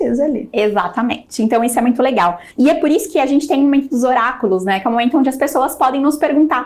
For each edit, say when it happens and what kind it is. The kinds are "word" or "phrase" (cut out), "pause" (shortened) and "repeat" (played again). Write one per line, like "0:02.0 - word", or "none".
0:02.5 - pause